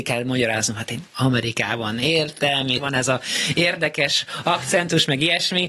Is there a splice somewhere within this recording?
yes; 2 cuts; at 1.1 s, 2.8 s

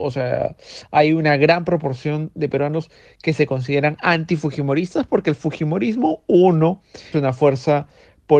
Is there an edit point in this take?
yes; 1 cut; at 7.1 s

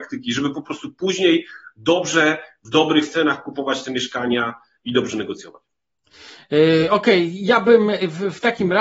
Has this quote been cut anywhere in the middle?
no; 0 cuts

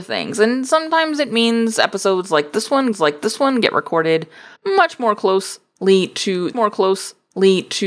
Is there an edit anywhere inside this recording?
yes; 3 cuts; at 2.9 s, 4.6 s, 6.5 s

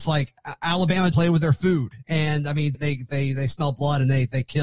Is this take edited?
yes; 2 cuts; at 1.1 s, 2.7 s

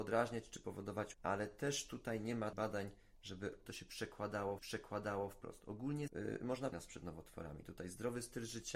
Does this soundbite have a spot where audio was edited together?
yes; 6 cuts; at 1.1 s, 2.5 s, 3.7 s, 4.6 s, 6.1 s, 6.7 s

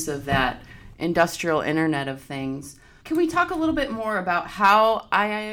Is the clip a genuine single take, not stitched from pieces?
yes; 0 cuts

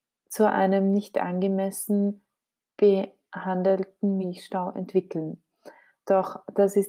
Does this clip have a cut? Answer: no; 0 cuts

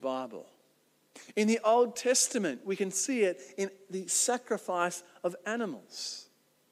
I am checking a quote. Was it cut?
no; 0 cuts

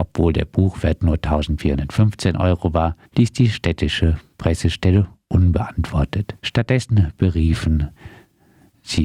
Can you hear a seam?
yes; 2 cuts; at 3.1 s, 6.4 s

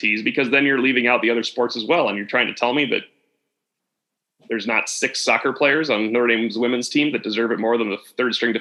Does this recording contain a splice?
no; 0 cuts

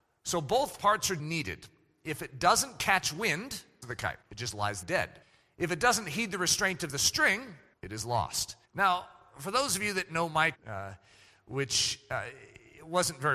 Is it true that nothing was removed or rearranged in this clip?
no; 8 cuts; at 1.2 s, 3.8 s, 4.2 s, 4.8 s, 5.2 s, 7.7 s, 8.6 s, 10.5 s

